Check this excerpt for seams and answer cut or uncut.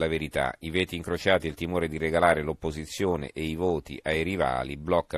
uncut